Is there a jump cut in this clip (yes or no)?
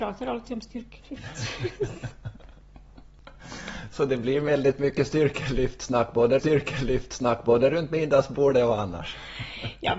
yes